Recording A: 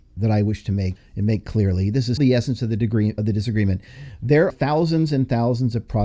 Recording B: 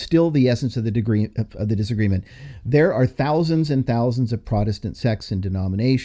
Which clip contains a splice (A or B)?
A